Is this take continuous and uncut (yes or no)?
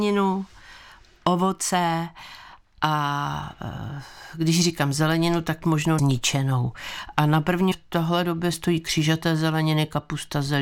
no